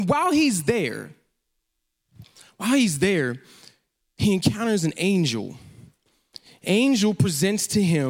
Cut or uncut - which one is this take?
cut